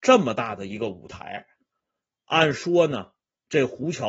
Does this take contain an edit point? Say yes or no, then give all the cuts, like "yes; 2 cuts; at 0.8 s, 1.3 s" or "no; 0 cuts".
no; 0 cuts